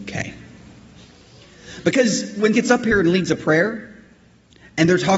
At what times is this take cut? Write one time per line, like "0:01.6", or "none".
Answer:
0:02.5